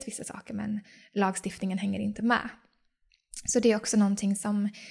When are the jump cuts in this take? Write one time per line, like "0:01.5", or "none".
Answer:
none